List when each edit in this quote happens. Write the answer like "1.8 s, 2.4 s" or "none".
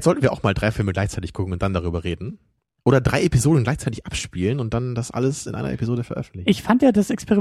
none